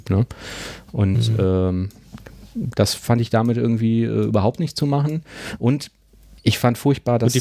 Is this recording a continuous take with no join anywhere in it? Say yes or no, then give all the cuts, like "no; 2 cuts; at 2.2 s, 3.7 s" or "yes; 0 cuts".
yes; 0 cuts